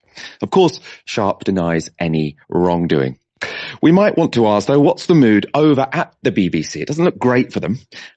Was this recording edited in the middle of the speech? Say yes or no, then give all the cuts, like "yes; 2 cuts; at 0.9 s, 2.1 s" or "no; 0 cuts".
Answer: yes; 1 cut; at 2.4 s